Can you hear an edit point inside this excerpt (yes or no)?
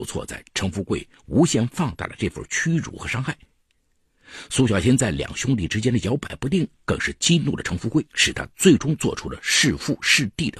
yes